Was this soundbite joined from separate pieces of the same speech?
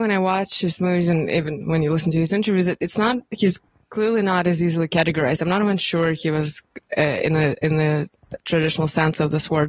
no; 0 cuts

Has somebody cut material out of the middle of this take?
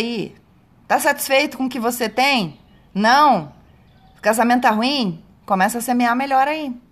no; 0 cuts

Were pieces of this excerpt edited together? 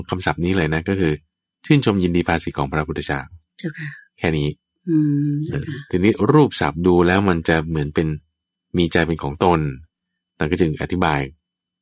no; 0 cuts

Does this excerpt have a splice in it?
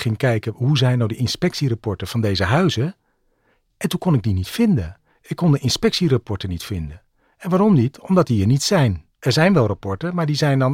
no; 0 cuts

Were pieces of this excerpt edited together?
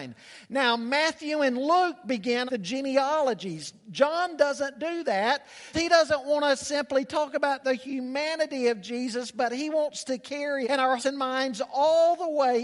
yes; 4 cuts; at 2.5 s, 5.7 s, 10.6 s, 11.0 s

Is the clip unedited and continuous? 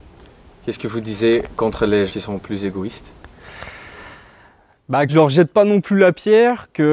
no; 2 cuts; at 2.1 s, 5.1 s

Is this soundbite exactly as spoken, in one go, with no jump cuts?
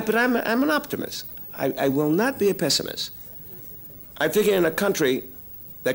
no; 1 cut; at 4.1 s

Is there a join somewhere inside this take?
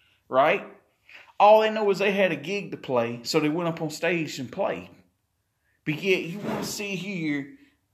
no; 0 cuts

